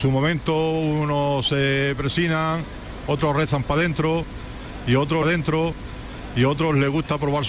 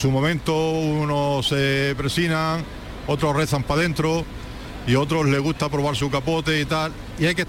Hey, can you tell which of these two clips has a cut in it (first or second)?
first